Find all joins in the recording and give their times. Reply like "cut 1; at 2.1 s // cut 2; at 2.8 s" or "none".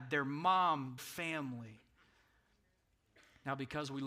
cut 1; at 1.0 s